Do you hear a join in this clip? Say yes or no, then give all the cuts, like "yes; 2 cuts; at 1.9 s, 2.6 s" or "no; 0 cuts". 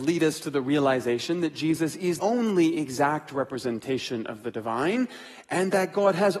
yes; 1 cut; at 2.2 s